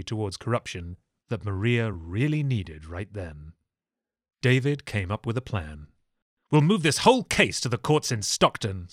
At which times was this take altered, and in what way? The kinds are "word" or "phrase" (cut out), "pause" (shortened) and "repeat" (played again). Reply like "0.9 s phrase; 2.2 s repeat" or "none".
none

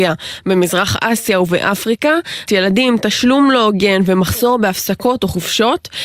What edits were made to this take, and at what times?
2.5 s word

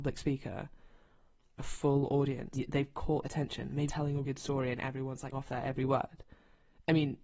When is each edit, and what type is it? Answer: 1.6 s word; 2.5 s word; 3.2 s word; 3.9 s word; 4.2 s word; 5.3 s word

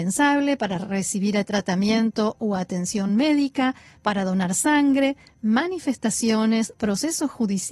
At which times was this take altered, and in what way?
none

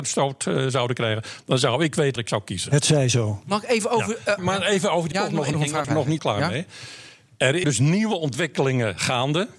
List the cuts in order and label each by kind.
2.2 s word; 4.4 s word; 5.1 s word; 5.5 s word; 5.8 s word; 6.2 s word; 7.6 s word

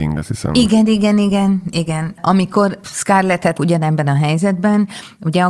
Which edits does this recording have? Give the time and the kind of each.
3.5 s word

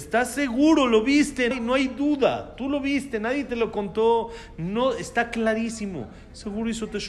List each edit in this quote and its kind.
1.5 s word

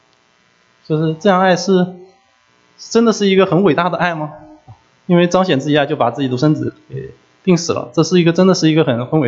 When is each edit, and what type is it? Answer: none

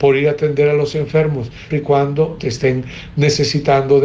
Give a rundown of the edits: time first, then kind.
1.7 s word; 2.4 s word

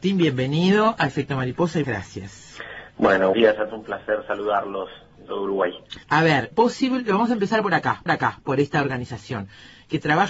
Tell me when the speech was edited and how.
1.8 s word; 3.3 s word; 3.7 s word; 5.3 s phrase; 6.0 s pause; 6.5 s word; 8.1 s repeat

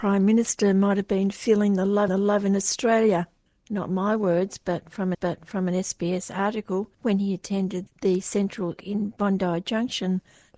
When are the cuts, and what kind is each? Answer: 2.1 s repeat; 3.5 s pause; 5.1 s repeat; 6.9 s pause; 8.8 s word

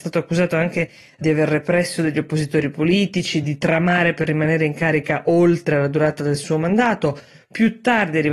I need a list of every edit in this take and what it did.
none

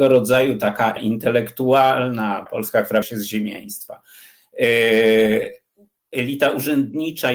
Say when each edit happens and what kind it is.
1.0 s word; 2.5 s phrase; 3.0 s word

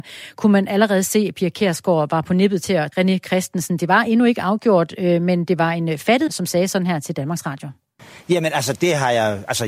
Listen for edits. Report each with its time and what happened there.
2.9 s phrase; 6.3 s word

